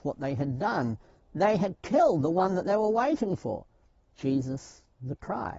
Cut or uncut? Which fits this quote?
uncut